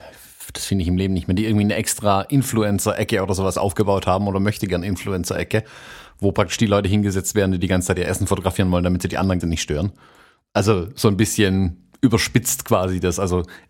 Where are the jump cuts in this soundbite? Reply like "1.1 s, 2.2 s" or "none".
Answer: 9.4 s